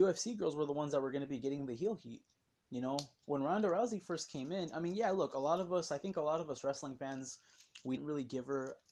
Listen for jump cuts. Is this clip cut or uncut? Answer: cut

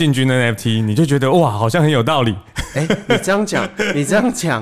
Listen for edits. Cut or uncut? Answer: uncut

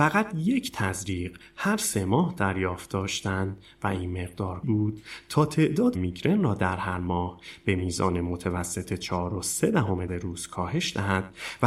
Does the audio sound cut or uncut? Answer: cut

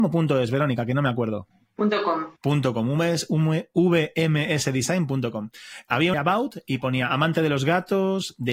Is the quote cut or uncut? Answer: cut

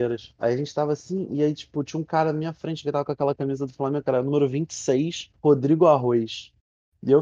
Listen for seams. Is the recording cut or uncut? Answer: cut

